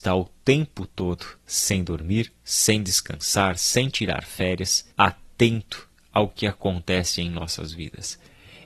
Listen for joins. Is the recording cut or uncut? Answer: cut